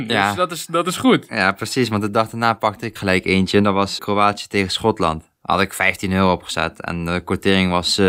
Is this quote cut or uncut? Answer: cut